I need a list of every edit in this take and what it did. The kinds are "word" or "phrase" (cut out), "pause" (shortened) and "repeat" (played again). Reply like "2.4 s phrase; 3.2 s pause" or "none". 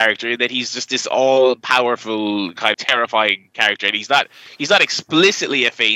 2.7 s word

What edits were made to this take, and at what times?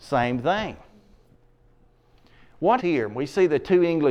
2.8 s word

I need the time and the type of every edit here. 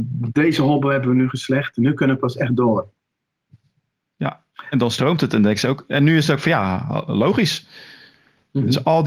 none

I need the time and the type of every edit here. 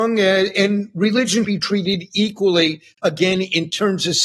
1.4 s word

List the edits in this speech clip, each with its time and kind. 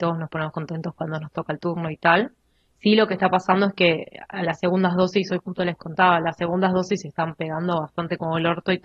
none

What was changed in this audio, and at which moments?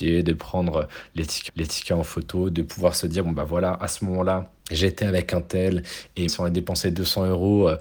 1.5 s repeat; 4.6 s pause; 6.3 s word

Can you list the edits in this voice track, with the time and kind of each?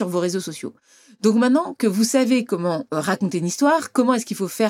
none

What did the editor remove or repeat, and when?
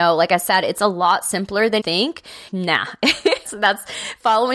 1.8 s word; 2.5 s word; 3.5 s word

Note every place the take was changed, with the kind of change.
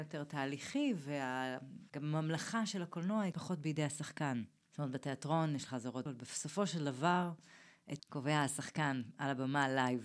3.3 s word; 5.7 s phrase; 6.1 s word; 8.0 s word

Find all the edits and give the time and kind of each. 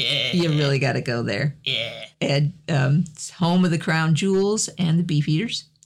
2.1 s pause

